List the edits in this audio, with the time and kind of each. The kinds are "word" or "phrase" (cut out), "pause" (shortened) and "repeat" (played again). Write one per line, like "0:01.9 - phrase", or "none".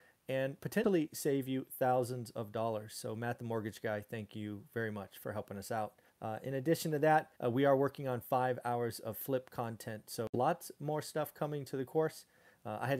0:06.1 - pause
0:07.3 - pause